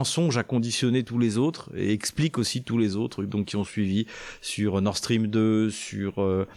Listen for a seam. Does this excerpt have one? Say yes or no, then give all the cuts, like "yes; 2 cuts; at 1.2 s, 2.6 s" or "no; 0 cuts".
no; 0 cuts